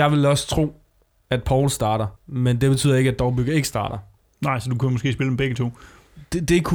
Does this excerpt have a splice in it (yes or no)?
yes